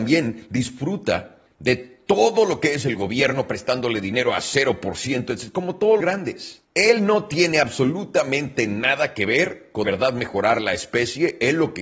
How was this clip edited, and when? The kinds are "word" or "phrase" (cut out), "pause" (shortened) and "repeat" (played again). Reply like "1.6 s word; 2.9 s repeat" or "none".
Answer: 1.5 s pause; 6.0 s word; 6.6 s pause; 9.8 s word